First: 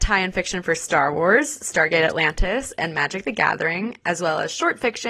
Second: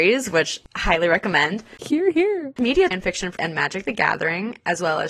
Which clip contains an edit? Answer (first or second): second